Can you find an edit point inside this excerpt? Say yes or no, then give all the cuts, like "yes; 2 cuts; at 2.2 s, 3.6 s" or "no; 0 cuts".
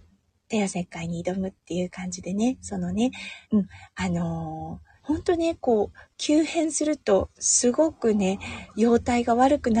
yes; 3 cuts; at 3.4 s, 5.0 s, 7.3 s